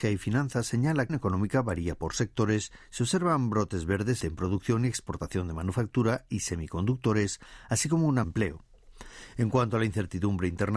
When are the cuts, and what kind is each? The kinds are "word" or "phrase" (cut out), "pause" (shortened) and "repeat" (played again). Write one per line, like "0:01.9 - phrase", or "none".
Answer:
0:01.1 - phrase
0:04.2 - word
0:08.2 - phrase